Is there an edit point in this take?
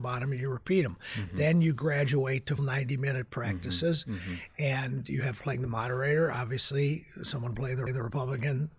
yes; 3 cuts; at 2.6 s, 5.4 s, 7.9 s

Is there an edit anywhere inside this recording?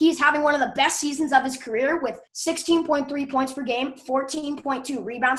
yes; 1 cut; at 2.3 s

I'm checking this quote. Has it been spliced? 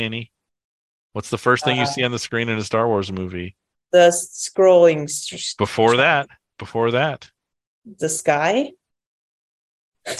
no; 0 cuts

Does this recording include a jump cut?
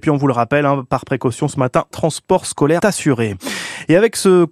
yes; 2 cuts; at 1.9 s, 2.8 s

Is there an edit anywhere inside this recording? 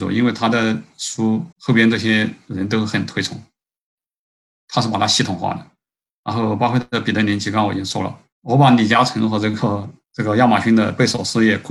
yes; 3 cuts; at 1.5 s, 8.3 s, 10.0 s

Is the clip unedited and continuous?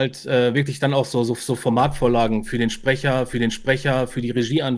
no; 1 cut; at 3.3 s

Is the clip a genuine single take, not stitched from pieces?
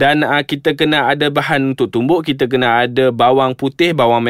yes; 0 cuts

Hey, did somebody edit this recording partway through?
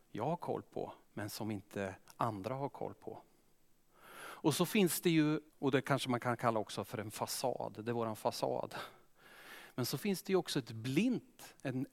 yes; 2 cuts; at 1.0 s, 5.5 s

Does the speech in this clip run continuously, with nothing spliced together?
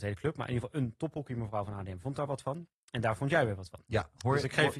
yes; 0 cuts

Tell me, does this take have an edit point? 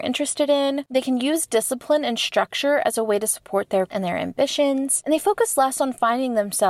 yes; 1 cut; at 3.9 s

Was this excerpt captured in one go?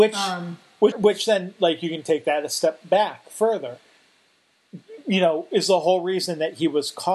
no; 1 cut; at 0.9 s

